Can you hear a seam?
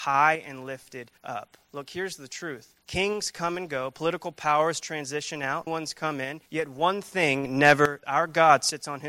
yes; 5 cuts; at 1.2 s, 2.8 s, 5.7 s, 6.5 s, 8.0 s

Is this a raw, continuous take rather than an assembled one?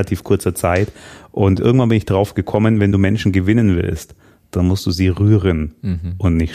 yes; 0 cuts

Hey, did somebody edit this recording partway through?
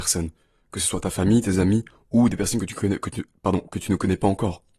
no; 0 cuts

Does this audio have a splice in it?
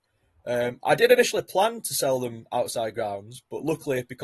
no; 0 cuts

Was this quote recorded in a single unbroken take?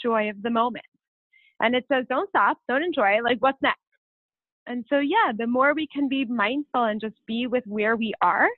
yes; 0 cuts

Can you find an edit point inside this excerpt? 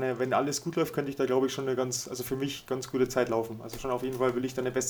no; 0 cuts

